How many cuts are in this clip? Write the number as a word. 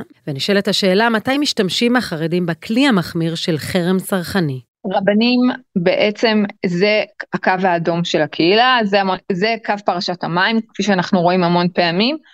zero